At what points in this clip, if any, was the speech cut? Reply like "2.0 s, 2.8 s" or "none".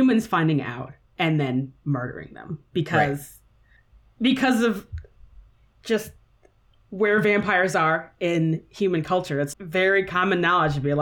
9.5 s